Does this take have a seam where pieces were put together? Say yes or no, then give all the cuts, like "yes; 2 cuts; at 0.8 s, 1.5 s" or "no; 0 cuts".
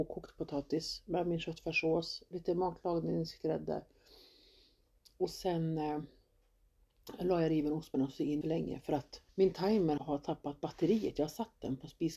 yes; 4 cuts; at 7.9 s, 8.4 s, 9.3 s, 10.0 s